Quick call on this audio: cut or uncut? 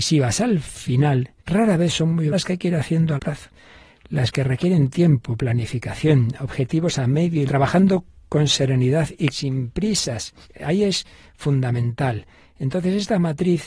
cut